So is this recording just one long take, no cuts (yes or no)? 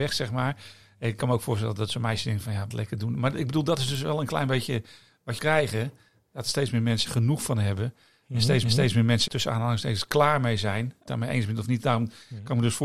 no